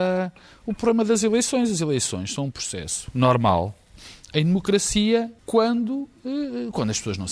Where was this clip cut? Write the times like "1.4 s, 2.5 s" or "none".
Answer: 5.4 s

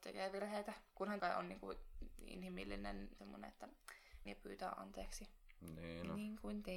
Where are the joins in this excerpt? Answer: 1.2 s, 3.2 s, 4.3 s

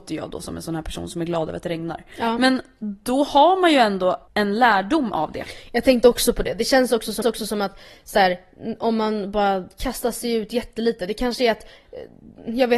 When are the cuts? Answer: 4.3 s, 7.2 s

